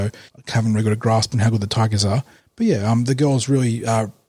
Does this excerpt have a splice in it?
no; 0 cuts

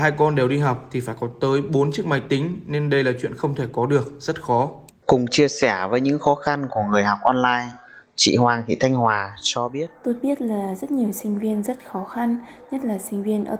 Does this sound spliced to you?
yes; 1 cut; at 4.9 s

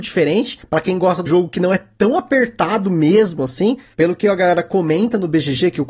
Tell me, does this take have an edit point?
yes; 1 cut; at 1.3 s

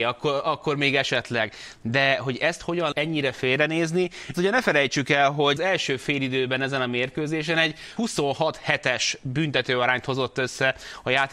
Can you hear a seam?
yes; 4 cuts; at 2.9 s, 4.3 s, 5.6 s, 8.0 s

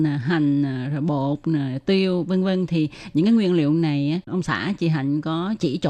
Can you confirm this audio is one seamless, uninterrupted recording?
yes; 0 cuts

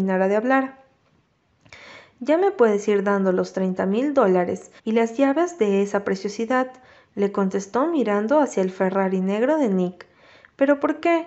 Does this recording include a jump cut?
yes; 1 cut; at 4.8 s

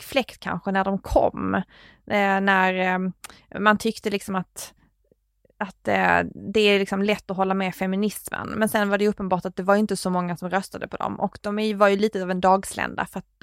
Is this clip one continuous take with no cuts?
yes; 0 cuts

